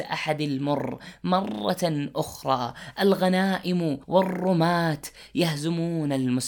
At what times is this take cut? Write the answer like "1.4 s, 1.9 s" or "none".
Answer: 4.0 s